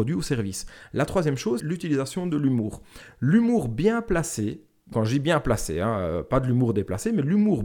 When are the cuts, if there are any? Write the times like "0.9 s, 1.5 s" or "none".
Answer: 1.6 s, 4.9 s